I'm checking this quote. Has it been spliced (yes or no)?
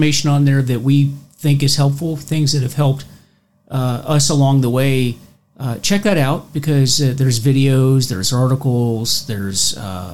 no